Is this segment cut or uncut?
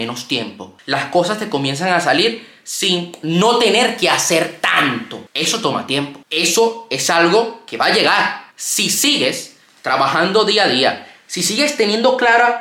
cut